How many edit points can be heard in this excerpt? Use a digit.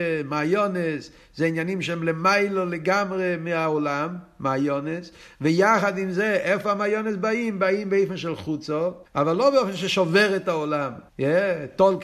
2